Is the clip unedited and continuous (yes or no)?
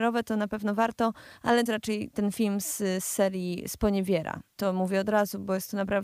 no